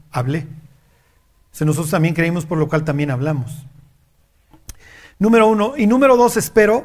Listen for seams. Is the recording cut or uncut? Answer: uncut